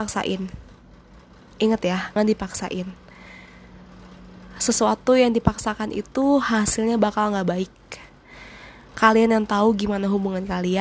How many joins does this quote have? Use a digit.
1